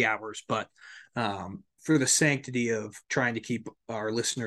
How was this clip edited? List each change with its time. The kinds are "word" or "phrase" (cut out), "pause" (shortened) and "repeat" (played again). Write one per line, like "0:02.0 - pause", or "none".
0:01.7 - pause
0:03.0 - pause